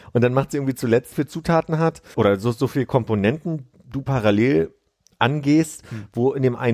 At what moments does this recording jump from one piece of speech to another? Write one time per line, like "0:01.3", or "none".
0:01.1
0:02.1